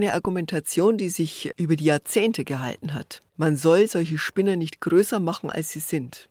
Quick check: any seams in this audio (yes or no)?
yes